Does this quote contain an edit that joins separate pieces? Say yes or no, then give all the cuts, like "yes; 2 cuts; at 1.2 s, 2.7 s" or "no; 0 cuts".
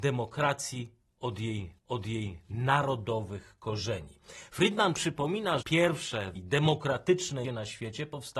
yes; 4 cuts; at 1.8 s, 5.6 s, 6.3 s, 7.4 s